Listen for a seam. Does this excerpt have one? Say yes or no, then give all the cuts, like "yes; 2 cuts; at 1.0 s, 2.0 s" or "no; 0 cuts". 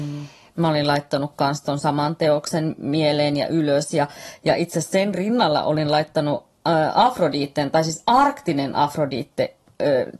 no; 0 cuts